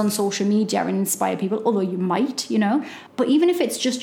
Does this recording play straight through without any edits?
no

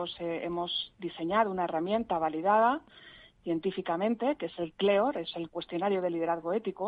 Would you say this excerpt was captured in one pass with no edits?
yes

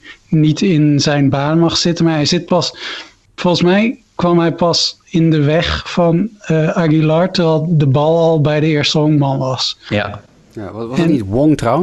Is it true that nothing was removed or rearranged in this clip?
yes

